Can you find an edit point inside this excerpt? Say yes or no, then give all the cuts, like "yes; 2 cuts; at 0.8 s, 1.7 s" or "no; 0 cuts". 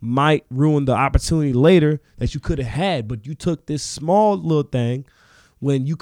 no; 0 cuts